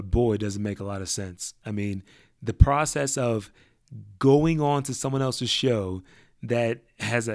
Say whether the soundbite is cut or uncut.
uncut